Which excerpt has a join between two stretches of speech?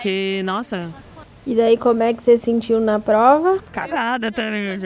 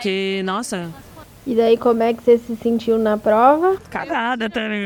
first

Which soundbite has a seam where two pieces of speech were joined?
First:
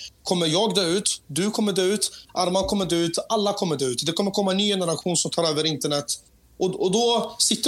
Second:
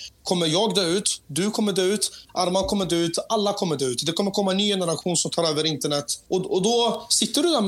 second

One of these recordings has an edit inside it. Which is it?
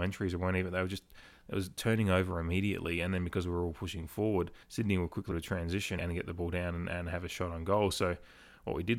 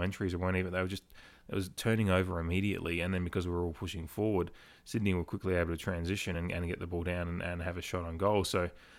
first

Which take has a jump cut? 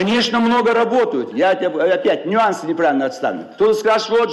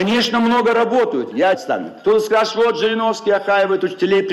second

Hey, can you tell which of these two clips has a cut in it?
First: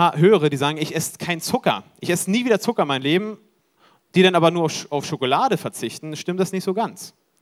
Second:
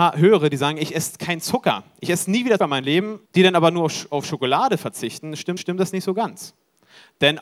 second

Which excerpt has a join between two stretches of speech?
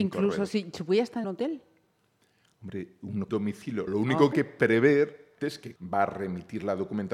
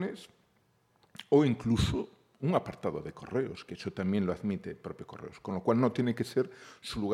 first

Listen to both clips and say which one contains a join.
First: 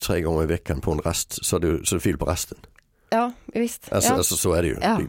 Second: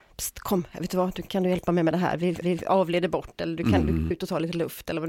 second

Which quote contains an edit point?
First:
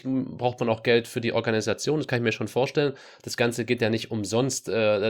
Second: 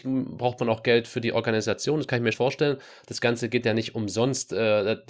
second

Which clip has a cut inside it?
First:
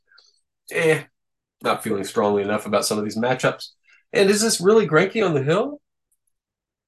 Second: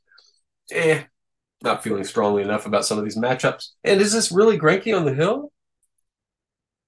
second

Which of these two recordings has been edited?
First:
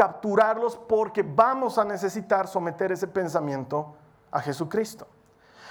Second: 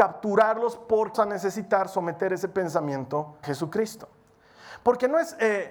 second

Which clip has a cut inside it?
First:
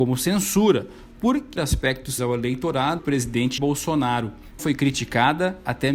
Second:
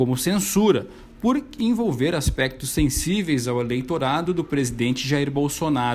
first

